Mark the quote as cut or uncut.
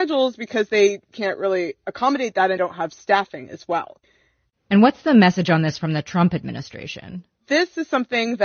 cut